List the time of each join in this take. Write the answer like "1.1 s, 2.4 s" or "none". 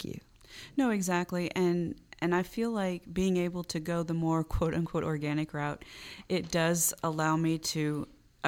none